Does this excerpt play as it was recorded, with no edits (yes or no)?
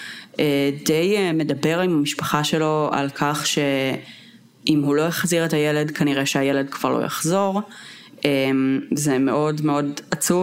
yes